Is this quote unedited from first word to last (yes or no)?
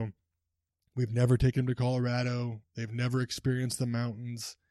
yes